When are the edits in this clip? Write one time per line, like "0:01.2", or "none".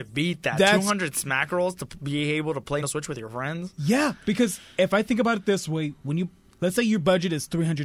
0:02.8